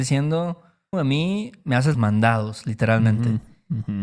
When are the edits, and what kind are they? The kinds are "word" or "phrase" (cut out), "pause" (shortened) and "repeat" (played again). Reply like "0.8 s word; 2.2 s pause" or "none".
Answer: 0.9 s word; 1.9 s word